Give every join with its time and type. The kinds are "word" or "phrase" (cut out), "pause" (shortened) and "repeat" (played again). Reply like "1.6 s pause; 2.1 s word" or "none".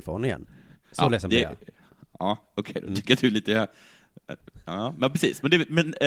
none